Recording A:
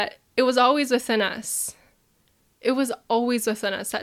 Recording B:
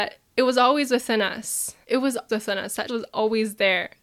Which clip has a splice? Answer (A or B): B